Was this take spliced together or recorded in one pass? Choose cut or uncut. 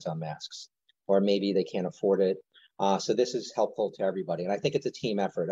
uncut